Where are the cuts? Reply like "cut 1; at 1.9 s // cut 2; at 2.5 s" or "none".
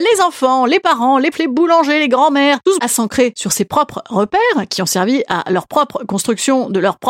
cut 1; at 1.3 s // cut 2; at 2.8 s